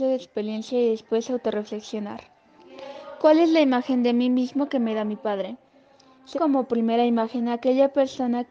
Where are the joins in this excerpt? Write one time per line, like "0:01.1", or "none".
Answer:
0:06.3